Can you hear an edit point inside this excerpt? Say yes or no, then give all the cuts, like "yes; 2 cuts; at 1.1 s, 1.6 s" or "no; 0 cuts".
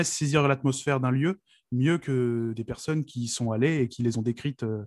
no; 0 cuts